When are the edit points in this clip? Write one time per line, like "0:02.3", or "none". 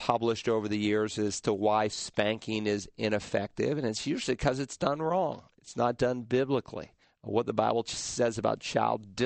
0:07.0